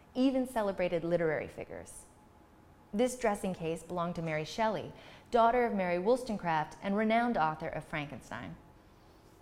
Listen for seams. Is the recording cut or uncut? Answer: uncut